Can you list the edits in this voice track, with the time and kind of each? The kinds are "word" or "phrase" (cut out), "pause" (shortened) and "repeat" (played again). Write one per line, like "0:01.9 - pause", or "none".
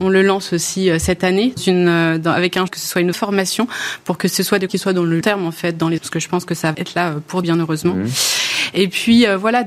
0:01.6 - word
0:02.7 - word
0:03.1 - word
0:04.7 - word
0:05.2 - word
0:06.0 - word
0:06.7 - word
0:07.4 - word